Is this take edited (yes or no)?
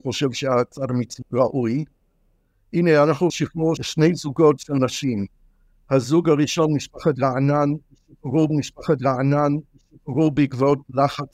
yes